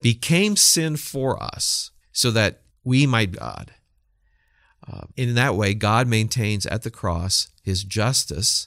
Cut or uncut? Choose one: cut